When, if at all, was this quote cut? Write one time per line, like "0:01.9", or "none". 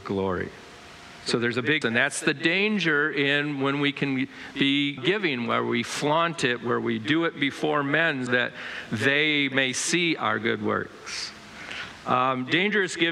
0:01.8
0:05.0
0:08.3

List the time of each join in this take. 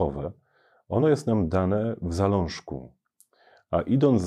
none

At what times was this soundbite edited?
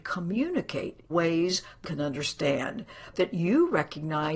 0:01.1
0:01.8
0:03.1

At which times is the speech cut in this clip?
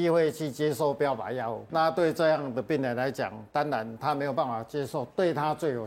0:01.7

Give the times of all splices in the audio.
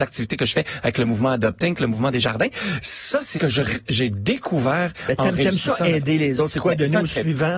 0:03.4

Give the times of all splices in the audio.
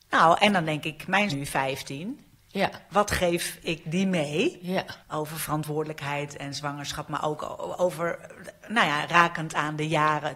0:01.3
0:02.3
0:05.0

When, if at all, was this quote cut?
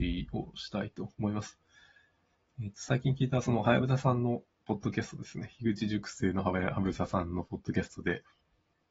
none

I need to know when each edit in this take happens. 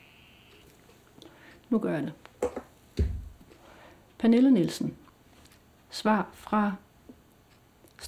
none

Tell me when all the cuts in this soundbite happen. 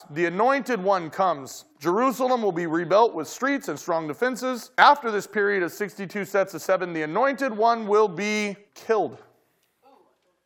0:01.7
0:04.7
0:08.7

